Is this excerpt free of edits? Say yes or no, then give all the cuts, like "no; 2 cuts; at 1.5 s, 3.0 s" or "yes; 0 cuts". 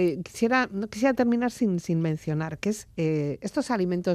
yes; 0 cuts